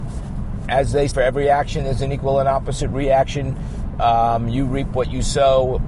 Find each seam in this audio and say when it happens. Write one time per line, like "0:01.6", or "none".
0:01.1